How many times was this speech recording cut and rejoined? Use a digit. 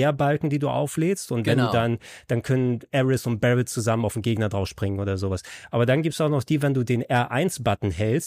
0